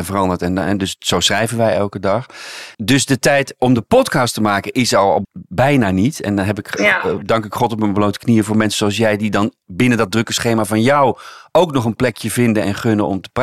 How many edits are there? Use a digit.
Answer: 2